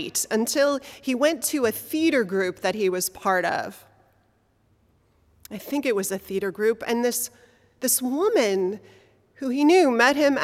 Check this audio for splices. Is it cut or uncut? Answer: uncut